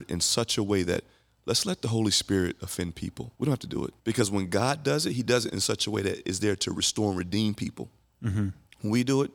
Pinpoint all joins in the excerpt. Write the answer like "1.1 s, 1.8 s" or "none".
3.3 s, 4.0 s